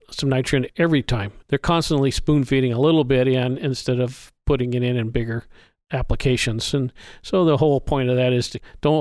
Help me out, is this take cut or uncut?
uncut